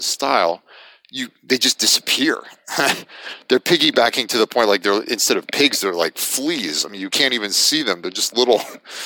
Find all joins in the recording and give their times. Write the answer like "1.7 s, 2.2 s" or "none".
none